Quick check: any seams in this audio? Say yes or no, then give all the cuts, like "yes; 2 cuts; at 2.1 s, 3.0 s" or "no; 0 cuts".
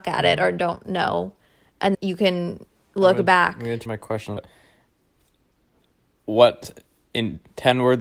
yes; 3 cuts; at 1.9 s, 3.9 s, 4.4 s